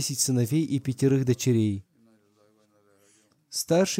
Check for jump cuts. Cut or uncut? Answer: uncut